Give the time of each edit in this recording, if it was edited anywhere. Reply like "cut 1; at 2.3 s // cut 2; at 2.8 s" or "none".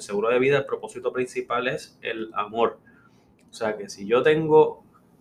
none